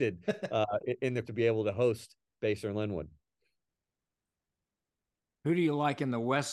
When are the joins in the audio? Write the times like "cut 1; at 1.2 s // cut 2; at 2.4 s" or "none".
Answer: cut 1; at 1.2 s